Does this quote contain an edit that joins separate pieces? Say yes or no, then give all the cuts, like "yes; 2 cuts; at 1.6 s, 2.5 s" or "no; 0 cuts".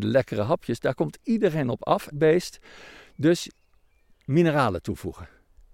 yes; 1 cut; at 2.1 s